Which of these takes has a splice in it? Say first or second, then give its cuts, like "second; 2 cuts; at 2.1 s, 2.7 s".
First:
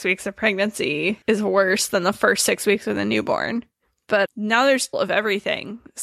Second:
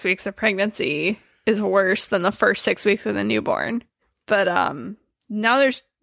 first; 3 cuts; at 1.2 s, 4.3 s, 4.9 s